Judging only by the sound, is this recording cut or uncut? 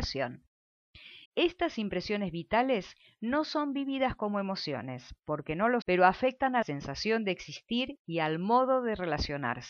cut